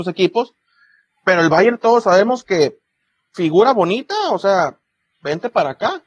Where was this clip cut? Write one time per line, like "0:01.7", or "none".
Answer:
none